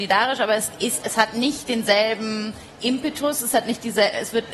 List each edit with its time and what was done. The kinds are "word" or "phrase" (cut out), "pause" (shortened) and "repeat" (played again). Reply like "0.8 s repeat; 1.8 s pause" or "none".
1.0 s word